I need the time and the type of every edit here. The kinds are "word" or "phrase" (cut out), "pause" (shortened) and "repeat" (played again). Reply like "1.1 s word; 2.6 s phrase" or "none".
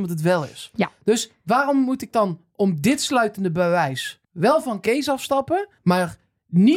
4.2 s pause; 5.8 s pause

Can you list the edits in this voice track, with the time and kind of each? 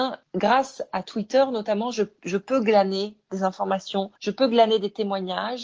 4.2 s pause

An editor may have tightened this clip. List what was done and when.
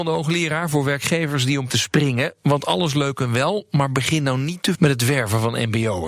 1.7 s phrase; 4.8 s word

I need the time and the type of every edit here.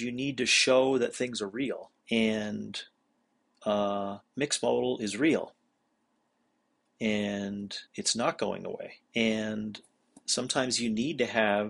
2.0 s pause; 4.2 s pause; 7.9 s pause; 9.1 s pause

